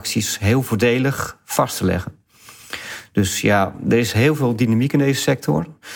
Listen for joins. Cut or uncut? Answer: uncut